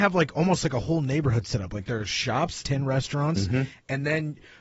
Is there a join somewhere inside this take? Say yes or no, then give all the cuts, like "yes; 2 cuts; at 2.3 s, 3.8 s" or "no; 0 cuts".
yes; 1 cut; at 2.6 s